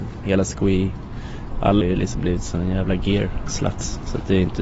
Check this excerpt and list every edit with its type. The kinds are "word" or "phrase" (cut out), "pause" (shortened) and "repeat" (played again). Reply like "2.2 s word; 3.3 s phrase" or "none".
1.8 s word